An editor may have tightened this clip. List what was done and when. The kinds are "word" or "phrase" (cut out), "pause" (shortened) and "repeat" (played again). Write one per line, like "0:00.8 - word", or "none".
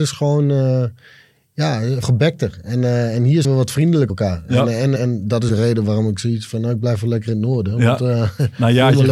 0:02.0 - word
0:03.4 - word
0:04.1 - word
0:05.0 - word
0:05.5 - word